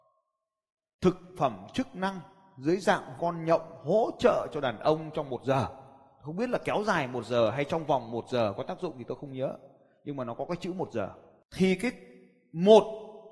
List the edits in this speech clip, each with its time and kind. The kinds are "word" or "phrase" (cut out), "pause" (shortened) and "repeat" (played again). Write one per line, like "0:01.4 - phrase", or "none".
0:03.2 - word